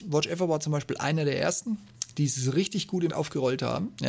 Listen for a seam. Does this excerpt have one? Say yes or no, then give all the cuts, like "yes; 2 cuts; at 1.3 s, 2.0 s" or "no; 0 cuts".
yes; 1 cut; at 3.1 s